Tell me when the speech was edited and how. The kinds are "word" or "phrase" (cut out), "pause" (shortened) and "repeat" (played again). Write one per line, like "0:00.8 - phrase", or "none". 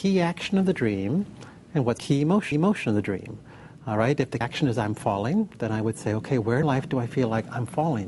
0:02.0 - word
0:02.5 - repeat
0:04.4 - word
0:06.6 - word